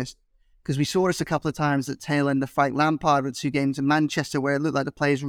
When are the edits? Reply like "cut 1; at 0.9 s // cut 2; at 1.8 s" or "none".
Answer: none